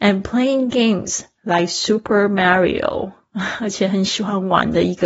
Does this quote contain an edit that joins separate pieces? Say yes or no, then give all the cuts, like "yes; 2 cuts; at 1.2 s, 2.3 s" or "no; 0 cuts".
no; 0 cuts